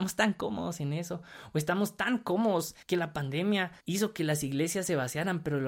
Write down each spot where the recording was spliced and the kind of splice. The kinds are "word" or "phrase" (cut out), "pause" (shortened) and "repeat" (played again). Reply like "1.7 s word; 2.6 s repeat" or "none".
2.8 s pause; 3.8 s pause